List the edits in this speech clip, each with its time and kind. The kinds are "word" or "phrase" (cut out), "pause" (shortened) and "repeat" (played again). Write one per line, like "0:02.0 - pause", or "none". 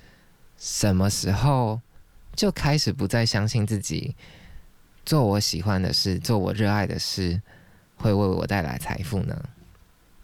none